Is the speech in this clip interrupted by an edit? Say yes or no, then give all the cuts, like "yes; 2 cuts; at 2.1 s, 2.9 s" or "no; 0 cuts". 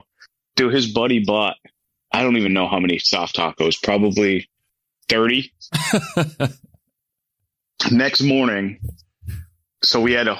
no; 0 cuts